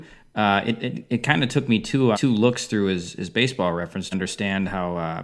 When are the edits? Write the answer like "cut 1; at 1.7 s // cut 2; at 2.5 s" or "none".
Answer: cut 1; at 2.1 s // cut 2; at 4.1 s